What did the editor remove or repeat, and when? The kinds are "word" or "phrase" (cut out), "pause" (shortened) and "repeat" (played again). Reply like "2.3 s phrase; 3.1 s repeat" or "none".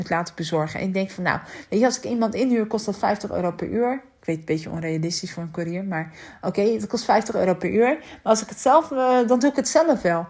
none